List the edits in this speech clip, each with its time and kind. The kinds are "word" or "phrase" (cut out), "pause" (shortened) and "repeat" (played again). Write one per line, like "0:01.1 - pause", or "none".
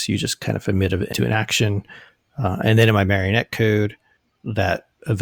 0:01.1 - word